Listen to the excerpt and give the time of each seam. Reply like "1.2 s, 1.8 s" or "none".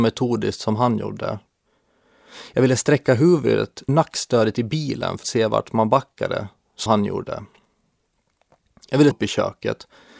3.9 s, 5.2 s, 6.9 s, 9.1 s